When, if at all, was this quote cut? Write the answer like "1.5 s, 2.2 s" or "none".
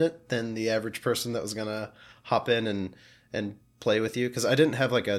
none

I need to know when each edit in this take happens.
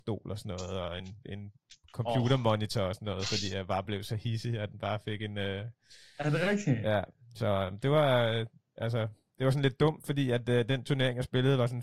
none

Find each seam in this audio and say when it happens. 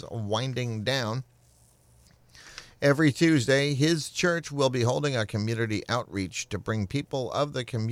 none

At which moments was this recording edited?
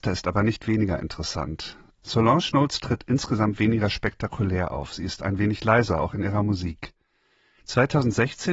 none

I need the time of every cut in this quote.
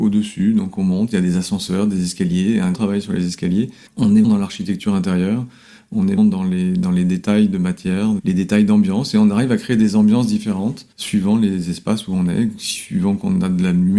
2.7 s, 4.2 s, 6.2 s, 10.9 s

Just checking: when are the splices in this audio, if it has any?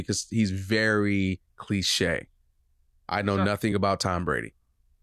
none

